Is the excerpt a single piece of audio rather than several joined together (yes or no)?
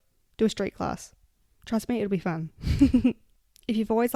yes